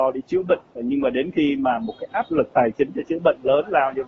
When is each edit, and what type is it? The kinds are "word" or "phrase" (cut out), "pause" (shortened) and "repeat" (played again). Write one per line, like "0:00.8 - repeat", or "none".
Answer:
none